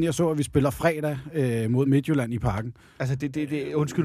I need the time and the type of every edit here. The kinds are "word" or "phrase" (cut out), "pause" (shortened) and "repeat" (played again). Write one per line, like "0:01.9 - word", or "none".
none